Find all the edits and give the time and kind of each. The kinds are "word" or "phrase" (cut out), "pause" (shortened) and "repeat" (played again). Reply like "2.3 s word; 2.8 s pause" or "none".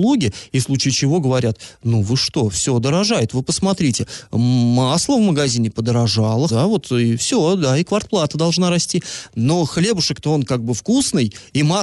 6.5 s phrase